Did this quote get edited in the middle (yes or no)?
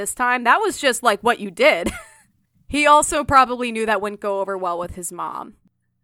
no